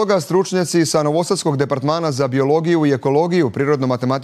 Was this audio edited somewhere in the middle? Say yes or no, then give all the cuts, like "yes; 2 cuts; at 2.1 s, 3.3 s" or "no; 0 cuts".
no; 0 cuts